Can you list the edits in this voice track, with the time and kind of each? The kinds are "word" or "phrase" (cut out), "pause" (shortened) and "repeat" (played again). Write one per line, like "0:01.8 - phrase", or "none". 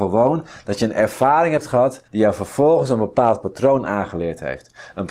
0:02.1 - pause

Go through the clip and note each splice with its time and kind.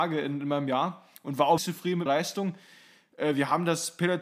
0:01.6 - word
0:02.1 - word

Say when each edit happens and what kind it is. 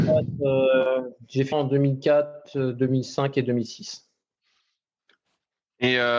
0:01.5 - word

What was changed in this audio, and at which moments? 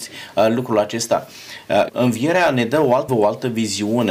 0:01.9 - phrase
0:03.1 - word

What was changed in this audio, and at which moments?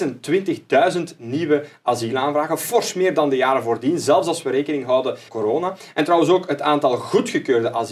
0:05.3 - word

